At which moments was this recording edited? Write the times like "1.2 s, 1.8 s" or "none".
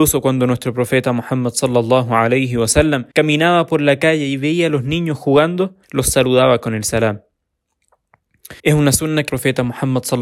3.1 s, 5.8 s, 8.6 s, 9.3 s